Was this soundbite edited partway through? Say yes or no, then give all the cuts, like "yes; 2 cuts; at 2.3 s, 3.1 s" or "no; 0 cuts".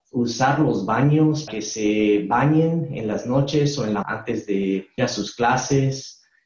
yes; 3 cuts; at 1.5 s, 4.0 s, 5.0 s